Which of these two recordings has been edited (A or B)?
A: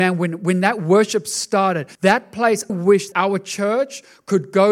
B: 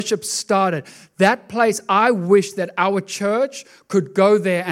A